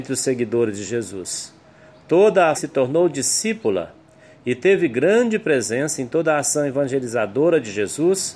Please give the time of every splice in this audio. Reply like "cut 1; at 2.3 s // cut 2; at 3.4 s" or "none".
cut 1; at 2.5 s